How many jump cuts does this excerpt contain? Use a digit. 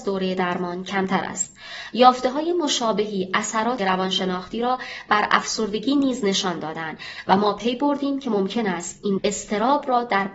2